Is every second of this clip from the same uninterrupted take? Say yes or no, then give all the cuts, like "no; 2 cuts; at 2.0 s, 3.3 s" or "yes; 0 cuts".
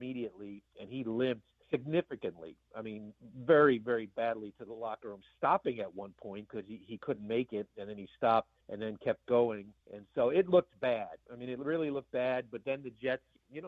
no; 4 cuts; at 1.6 s, 8.6 s, 9.8 s, 11.2 s